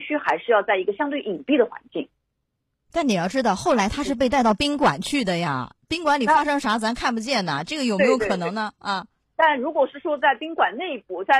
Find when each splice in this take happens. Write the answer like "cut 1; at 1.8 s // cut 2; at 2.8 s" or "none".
none